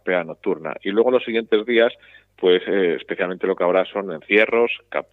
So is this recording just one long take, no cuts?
yes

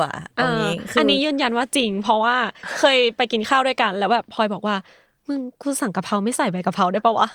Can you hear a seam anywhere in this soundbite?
no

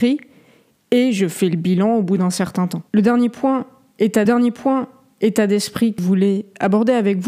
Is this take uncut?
no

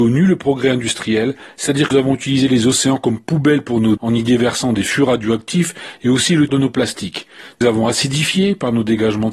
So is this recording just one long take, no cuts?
no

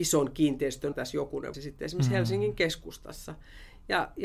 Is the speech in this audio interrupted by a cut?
yes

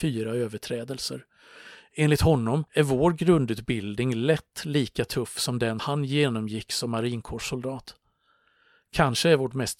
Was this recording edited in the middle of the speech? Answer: yes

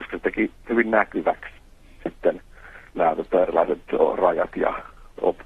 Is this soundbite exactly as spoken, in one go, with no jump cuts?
yes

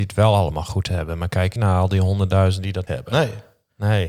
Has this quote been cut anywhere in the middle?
yes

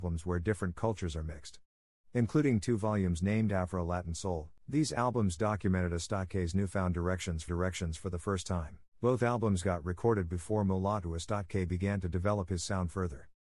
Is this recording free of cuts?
no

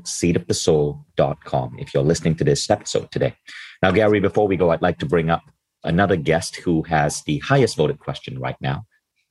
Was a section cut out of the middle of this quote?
no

